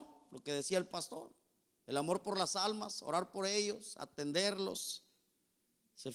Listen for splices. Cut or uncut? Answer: uncut